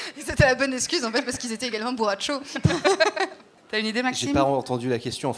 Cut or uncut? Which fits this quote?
cut